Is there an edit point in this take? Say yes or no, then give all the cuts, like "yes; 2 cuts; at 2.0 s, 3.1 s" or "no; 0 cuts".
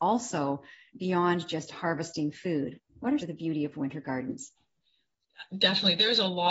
yes; 2 cuts; at 2.9 s, 3.2 s